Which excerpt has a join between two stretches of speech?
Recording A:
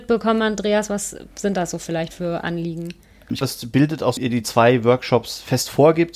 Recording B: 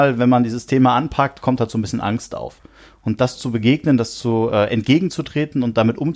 A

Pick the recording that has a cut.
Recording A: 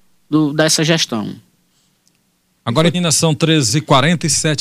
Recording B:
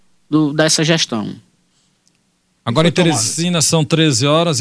A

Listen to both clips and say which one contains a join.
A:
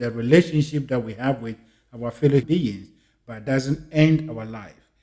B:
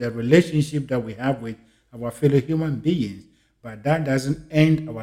A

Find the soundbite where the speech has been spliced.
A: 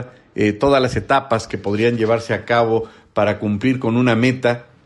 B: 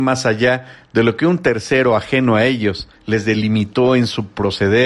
B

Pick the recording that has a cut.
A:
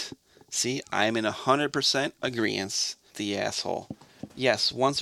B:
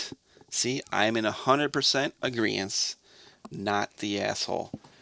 A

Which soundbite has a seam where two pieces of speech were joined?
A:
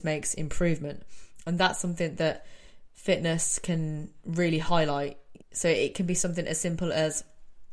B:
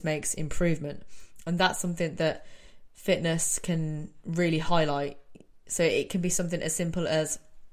A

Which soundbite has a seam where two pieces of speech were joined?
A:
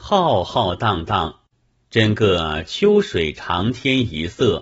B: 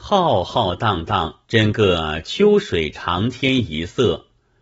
B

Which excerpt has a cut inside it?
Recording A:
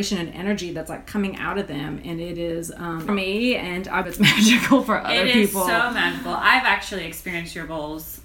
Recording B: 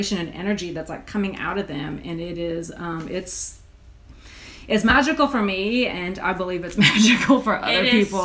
A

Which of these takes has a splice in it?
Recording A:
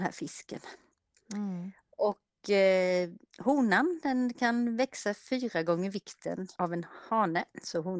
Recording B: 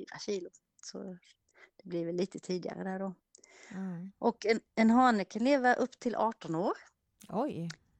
A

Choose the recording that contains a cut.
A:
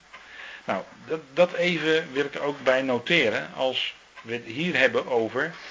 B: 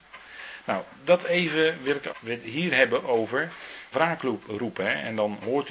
B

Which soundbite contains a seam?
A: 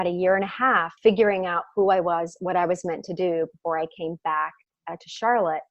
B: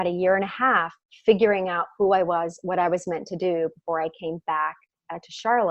A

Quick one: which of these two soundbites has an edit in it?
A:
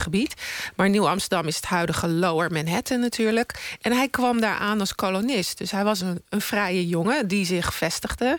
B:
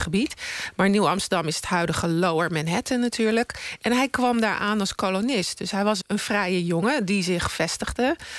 B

